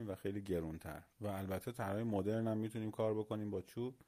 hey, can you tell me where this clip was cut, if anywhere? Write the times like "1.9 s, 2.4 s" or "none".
1.1 s